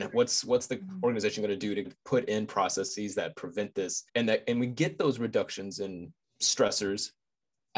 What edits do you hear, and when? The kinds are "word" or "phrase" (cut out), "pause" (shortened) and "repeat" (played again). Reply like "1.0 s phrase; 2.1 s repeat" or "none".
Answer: 1.8 s word; 4.1 s pause; 6.2 s pause